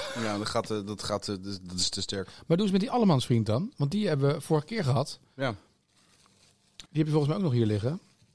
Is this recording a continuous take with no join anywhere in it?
no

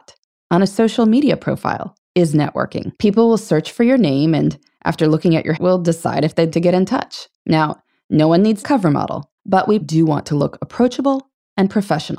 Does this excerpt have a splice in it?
yes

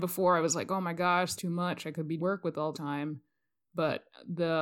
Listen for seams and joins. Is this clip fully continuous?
no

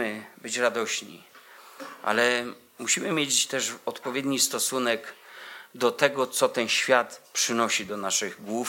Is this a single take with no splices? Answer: yes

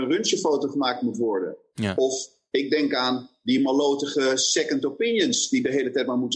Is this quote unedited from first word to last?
yes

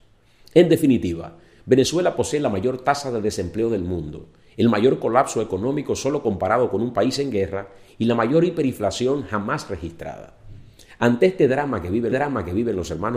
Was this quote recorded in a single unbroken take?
no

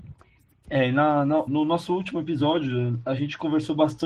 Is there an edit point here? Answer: yes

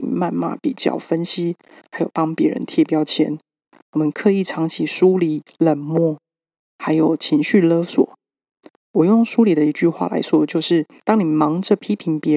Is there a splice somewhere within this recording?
no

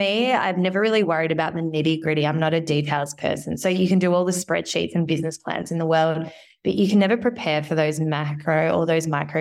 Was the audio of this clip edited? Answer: no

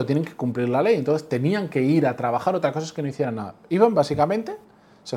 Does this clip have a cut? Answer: no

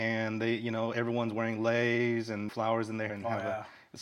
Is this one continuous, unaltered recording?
no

